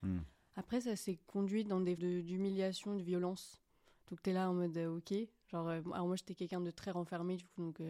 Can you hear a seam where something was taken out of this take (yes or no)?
yes